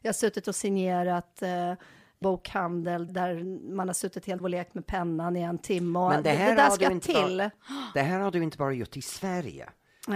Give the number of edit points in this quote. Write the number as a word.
three